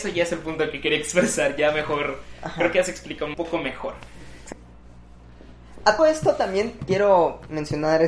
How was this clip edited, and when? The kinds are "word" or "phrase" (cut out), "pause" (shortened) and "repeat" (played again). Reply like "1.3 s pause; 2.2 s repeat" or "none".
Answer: 3.3 s word; 6.0 s word; 6.8 s word